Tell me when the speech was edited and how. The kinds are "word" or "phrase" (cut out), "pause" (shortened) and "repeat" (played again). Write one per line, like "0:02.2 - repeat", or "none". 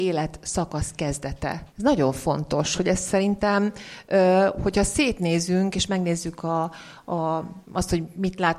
0:01.7 - pause
0:07.6 - pause